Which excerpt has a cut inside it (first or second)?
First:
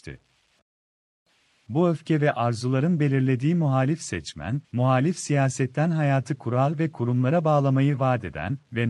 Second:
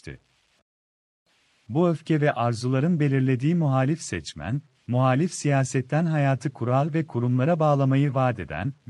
first